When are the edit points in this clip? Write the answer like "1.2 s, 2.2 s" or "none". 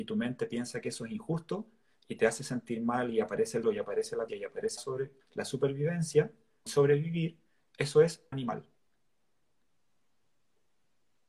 3.6 s, 4.3 s, 4.8 s, 5.2 s, 6.7 s, 8.3 s